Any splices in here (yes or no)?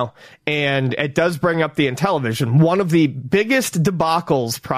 no